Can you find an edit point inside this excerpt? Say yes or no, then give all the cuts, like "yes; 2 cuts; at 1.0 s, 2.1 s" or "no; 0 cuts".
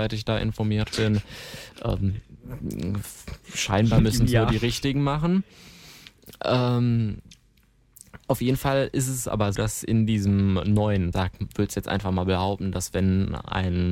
yes; 2 cuts; at 9.5 s, 11.1 s